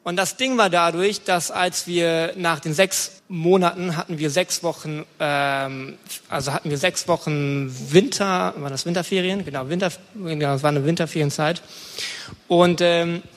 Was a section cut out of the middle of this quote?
yes; 1 cut; at 3.2 s

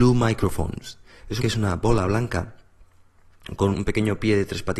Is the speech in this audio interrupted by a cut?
yes; 2 cuts; at 1.4 s, 3.7 s

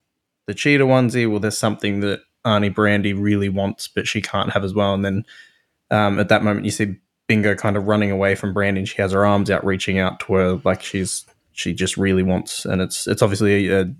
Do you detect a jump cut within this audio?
no; 0 cuts

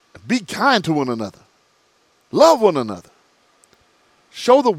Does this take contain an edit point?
no; 0 cuts

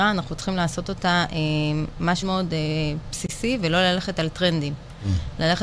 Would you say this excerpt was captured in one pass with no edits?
no; 1 cut; at 2.2 s

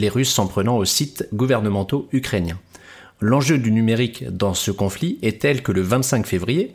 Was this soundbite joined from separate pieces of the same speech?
no; 0 cuts

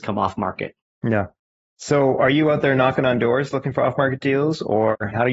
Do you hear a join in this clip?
no; 0 cuts

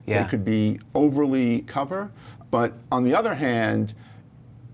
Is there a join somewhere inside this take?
yes; 3 cuts; at 1.7 s, 2.5 s, 2.8 s

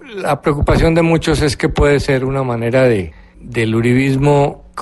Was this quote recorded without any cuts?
yes; 0 cuts

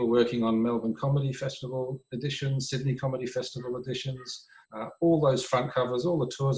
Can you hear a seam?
yes; 1 cut; at 4.6 s

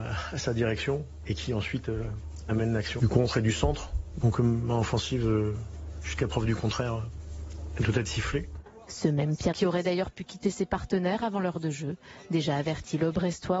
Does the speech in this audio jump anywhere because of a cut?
yes; 2 cuts; at 3.0 s, 9.5 s

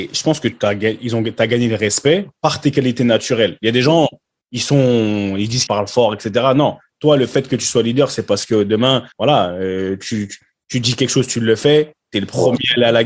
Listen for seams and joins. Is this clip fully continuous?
no; 2 cuts; at 5.7 s, 9.1 s

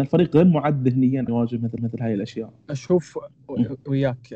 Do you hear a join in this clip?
yes; 3 cuts; at 1.3 s, 1.8 s, 2.6 s

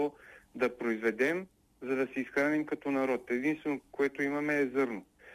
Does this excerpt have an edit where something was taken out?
no; 0 cuts

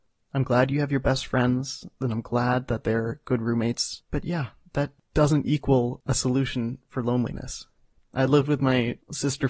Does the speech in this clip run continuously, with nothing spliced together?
yes; 0 cuts

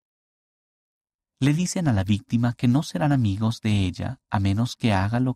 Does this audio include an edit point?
no; 0 cuts

